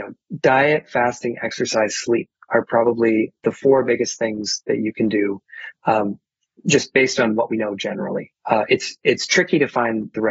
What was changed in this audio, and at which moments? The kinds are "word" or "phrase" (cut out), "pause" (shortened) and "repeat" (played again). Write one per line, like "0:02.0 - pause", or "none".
0:08.4 - pause